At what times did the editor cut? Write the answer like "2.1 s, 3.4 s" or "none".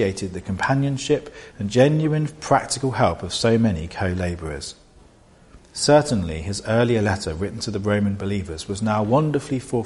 5.6 s